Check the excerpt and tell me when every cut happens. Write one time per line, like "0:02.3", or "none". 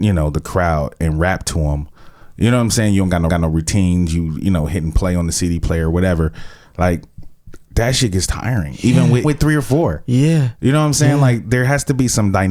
0:03.3
0:09.2